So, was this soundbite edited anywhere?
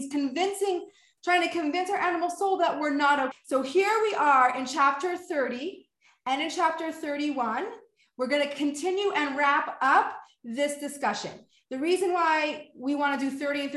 yes; 1 cut; at 3.3 s

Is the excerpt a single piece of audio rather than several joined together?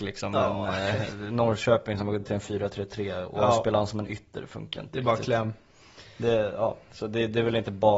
no; 1 cut; at 2.2 s

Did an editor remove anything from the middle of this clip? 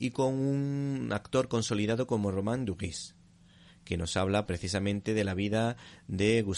yes; 1 cut; at 4.5 s

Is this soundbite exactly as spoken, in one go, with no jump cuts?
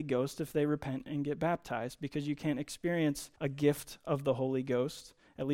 no; 1 cut; at 3.3 s

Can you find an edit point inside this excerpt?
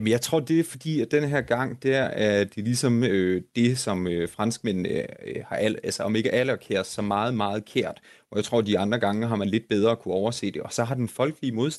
no; 0 cuts

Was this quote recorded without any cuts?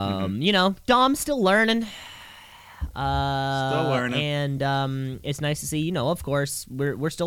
yes; 0 cuts

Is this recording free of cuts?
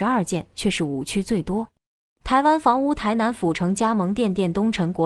yes; 0 cuts

